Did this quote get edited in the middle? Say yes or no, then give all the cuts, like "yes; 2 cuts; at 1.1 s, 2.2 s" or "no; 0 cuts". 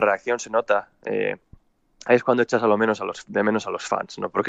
no; 0 cuts